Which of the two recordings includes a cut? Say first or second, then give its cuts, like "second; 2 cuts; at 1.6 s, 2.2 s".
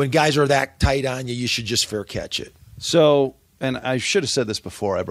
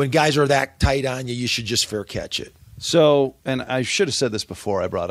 second; 1 cut; at 3.4 s